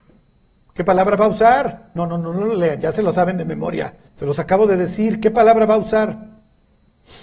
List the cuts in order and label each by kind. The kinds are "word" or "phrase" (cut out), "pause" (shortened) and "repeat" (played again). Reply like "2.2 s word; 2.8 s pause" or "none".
4.1 s pause